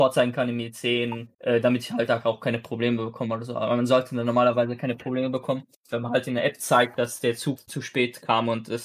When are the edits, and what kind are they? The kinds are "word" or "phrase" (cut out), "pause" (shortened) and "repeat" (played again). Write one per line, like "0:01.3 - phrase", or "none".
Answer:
0:01.3 - pause
0:07.6 - word